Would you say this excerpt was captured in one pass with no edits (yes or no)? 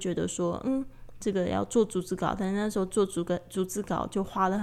yes